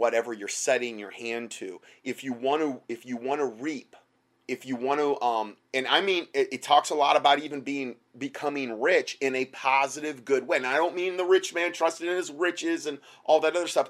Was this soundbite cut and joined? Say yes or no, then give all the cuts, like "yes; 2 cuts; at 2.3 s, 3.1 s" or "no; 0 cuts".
yes; 1 cut; at 4.2 s